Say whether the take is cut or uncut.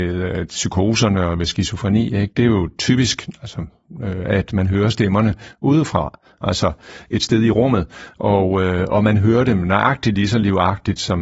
uncut